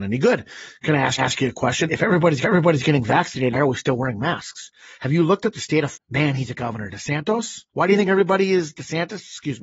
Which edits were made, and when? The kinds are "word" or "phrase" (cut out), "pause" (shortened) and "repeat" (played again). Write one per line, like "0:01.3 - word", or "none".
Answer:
0:01.2 - repeat
0:01.9 - word
0:02.4 - repeat
0:03.5 - word
0:05.9 - word
0:06.5 - word
0:07.7 - pause